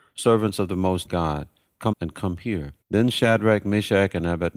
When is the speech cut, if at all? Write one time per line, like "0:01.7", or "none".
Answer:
0:01.0
0:01.9
0:02.8